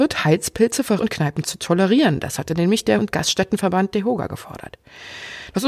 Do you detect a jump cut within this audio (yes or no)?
yes